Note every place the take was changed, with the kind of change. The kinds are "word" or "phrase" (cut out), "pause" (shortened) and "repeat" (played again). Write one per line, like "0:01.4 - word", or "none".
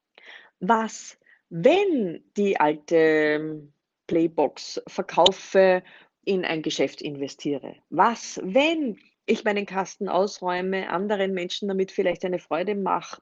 0:02.3 - word
0:06.2 - word